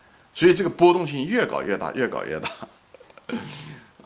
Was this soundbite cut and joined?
no; 0 cuts

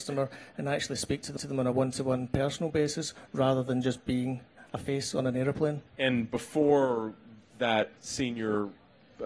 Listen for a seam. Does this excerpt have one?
yes; 3 cuts; at 1.4 s, 5.9 s, 8.0 s

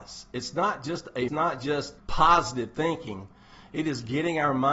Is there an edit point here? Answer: yes; 2 cuts; at 1.3 s, 2.0 s

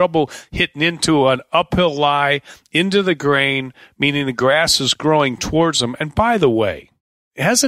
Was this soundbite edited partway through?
no; 0 cuts

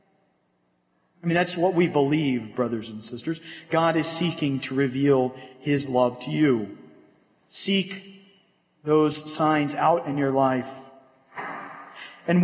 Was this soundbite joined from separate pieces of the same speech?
no; 0 cuts

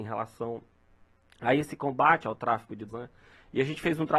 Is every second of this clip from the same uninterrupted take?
no; 1 cut; at 2.9 s

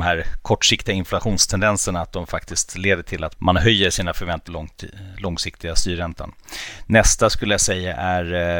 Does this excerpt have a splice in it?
yes; 2 cuts; at 3.3 s, 4.5 s

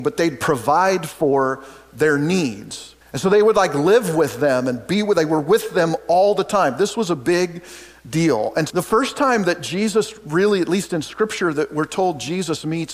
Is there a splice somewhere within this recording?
yes; 2 cuts; at 3.0 s, 8.7 s

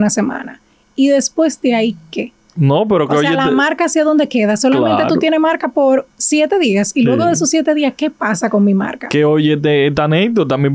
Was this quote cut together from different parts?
no; 0 cuts

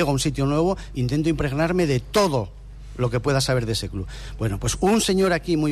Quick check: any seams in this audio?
no; 0 cuts

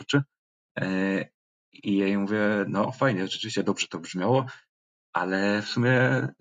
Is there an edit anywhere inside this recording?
no; 0 cuts

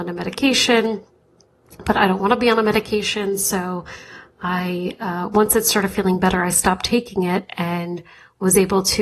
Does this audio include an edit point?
no; 0 cuts

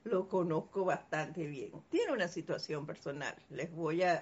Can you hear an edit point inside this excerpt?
yes; 1 cut; at 1.9 s

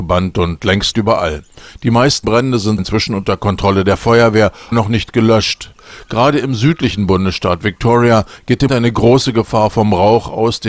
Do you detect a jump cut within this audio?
yes; 5 cuts; at 0.9 s, 2.2 s, 2.8 s, 4.7 s, 8.7 s

